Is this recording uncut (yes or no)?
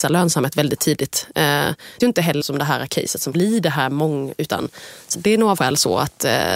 no